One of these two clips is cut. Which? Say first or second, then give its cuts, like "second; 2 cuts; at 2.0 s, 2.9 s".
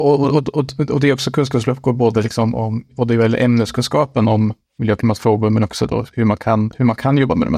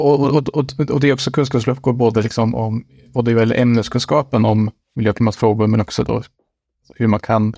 first; 2 cuts; at 2.9 s, 6.1 s